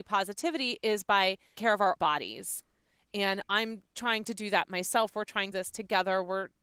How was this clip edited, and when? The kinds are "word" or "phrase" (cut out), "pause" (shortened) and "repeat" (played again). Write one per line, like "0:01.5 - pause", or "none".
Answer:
0:01.6 - word
0:02.0 - word
0:05.5 - phrase